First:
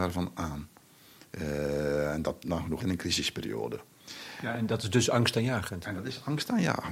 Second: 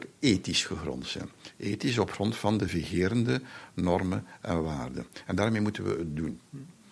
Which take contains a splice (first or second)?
first